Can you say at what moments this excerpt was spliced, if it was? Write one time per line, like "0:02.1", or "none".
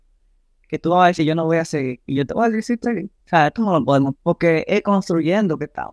0:01.2
0:02.0
0:02.8
0:03.2
0:04.1